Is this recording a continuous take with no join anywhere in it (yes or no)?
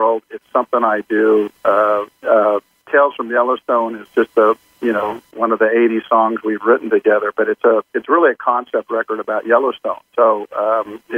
yes